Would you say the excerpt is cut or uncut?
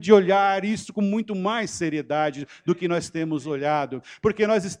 uncut